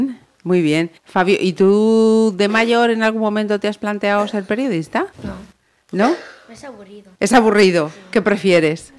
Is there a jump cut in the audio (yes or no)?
yes